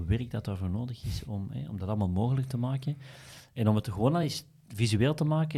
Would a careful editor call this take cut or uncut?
uncut